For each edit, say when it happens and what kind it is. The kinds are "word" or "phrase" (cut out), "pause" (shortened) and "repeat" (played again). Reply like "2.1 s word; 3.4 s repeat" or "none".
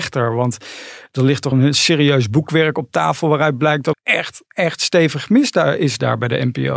1.5 s word; 3.9 s word; 4.4 s pause